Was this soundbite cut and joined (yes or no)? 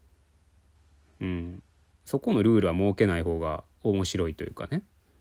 no